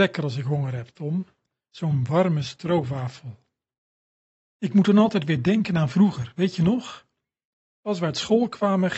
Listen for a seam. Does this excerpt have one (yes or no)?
no